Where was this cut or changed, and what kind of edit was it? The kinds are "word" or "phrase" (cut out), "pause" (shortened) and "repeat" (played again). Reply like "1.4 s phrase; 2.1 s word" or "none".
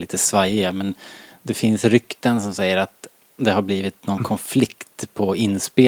none